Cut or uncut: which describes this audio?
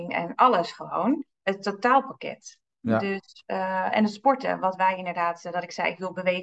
uncut